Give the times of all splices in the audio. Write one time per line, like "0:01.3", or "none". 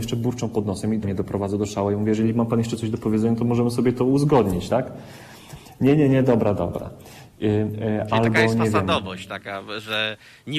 0:01.0